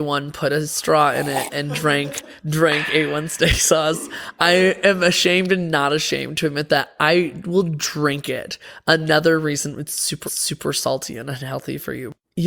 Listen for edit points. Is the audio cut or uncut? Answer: cut